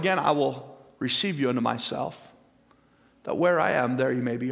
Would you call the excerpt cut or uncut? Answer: uncut